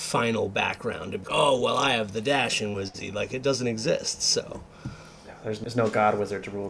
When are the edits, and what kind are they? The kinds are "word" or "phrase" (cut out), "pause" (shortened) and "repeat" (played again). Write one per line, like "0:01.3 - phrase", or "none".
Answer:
0:01.2 - word
0:05.6 - word

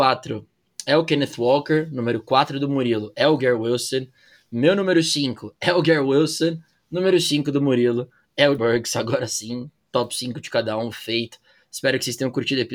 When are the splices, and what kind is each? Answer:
0:08.6 - word

